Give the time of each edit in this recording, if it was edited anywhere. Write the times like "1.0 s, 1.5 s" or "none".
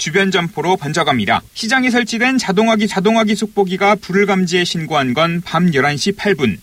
1.5 s, 2.9 s